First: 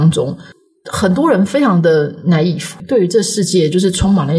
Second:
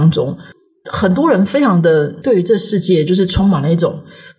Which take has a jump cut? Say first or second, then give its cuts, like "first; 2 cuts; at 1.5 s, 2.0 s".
second; 1 cut; at 2.2 s